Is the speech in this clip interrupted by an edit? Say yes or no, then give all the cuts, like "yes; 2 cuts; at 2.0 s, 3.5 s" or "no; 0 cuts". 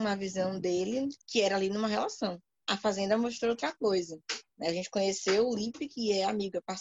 yes; 2 cuts; at 1.2 s, 4.5 s